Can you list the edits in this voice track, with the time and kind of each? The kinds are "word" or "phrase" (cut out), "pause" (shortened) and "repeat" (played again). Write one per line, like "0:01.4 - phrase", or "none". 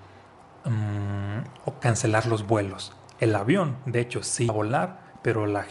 0:04.5 - word